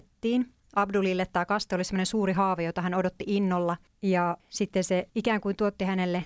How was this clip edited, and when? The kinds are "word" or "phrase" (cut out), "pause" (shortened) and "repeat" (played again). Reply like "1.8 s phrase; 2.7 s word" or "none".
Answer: none